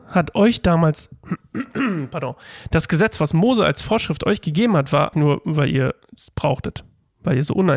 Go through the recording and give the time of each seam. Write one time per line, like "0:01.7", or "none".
0:05.1